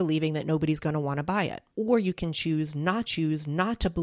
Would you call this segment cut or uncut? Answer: cut